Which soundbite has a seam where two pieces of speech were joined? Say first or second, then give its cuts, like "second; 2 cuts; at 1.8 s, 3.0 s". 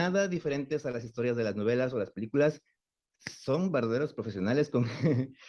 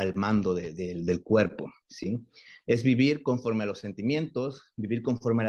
second; 1 cut; at 1.8 s